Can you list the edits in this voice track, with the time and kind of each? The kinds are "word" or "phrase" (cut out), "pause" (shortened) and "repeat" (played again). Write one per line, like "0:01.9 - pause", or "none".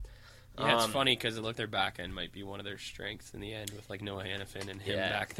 0:01.5 - word